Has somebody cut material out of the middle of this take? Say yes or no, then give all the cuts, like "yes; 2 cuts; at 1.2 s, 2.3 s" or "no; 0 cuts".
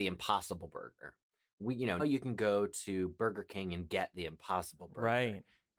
yes; 1 cut; at 2.0 s